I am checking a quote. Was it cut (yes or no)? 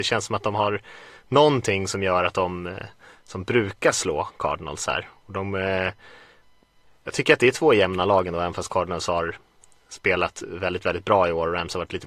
no